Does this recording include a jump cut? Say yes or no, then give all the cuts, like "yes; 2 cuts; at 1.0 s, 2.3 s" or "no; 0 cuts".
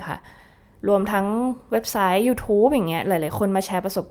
no; 0 cuts